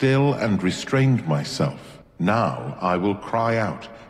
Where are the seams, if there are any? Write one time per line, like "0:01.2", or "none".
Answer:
0:02.0

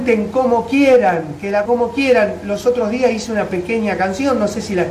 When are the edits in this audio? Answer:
0:01.7

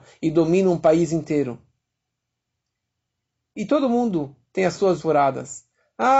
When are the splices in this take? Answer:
0:05.0

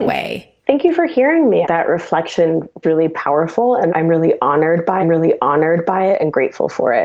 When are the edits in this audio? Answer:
0:01.6
0:02.8
0:03.9
0:05.0

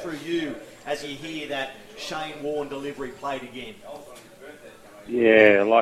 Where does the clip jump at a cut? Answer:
none

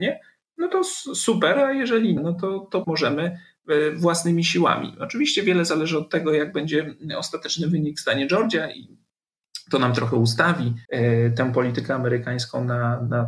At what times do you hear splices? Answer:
0:02.2
0:02.8
0:10.8

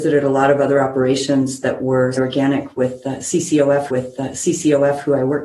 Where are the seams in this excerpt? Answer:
0:02.1
0:03.9

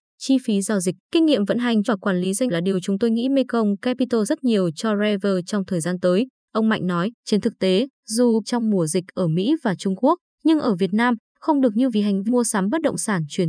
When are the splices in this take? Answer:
0:01.0
0:01.8
0:02.5
0:04.3
0:07.2
0:08.4
0:11.9
0:12.3

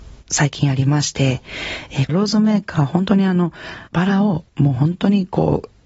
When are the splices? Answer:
0:02.1
0:03.9
0:04.5

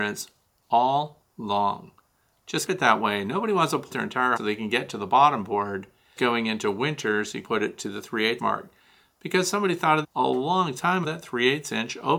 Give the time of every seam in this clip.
0:01.2
0:02.7
0:03.9
0:04.4
0:06.2
0:07.4
0:08.4
0:10.0
0:11.0

